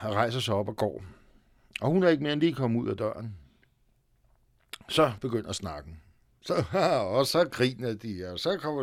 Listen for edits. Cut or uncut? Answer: uncut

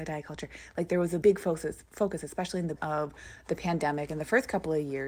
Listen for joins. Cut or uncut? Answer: cut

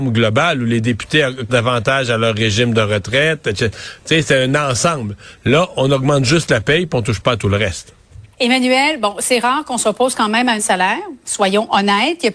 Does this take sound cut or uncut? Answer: cut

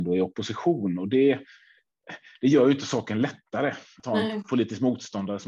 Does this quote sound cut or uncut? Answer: uncut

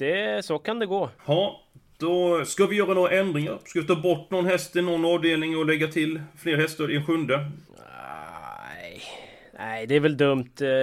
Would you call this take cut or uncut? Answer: cut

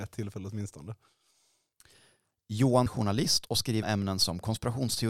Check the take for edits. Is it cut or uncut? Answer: cut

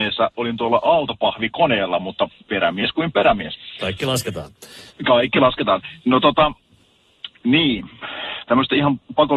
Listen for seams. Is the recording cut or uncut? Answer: cut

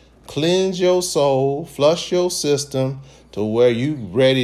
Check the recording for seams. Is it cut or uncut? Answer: uncut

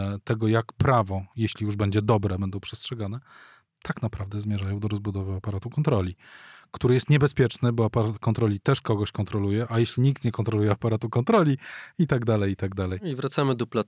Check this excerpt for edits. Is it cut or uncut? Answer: uncut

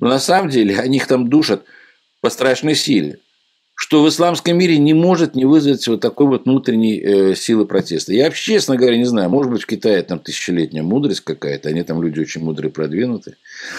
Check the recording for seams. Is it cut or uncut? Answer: uncut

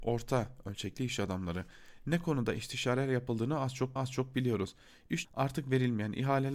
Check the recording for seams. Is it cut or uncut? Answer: cut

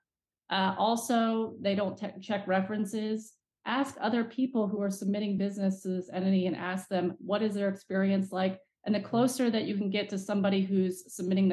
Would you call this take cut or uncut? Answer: uncut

